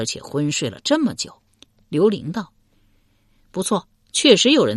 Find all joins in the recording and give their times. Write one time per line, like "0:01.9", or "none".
0:01.5